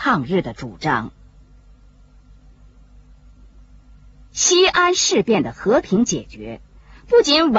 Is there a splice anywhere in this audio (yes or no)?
no